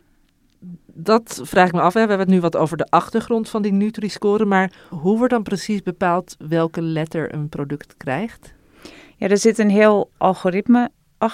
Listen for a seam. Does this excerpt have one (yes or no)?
no